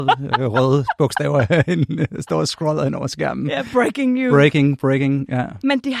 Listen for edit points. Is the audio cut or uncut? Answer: uncut